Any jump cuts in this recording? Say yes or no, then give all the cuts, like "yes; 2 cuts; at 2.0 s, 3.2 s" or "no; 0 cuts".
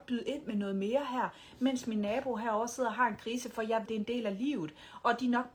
yes; 1 cut; at 3.9 s